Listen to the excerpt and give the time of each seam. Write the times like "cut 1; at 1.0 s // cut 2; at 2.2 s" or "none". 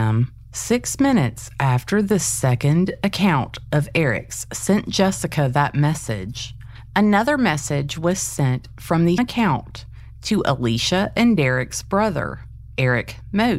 cut 1; at 9.2 s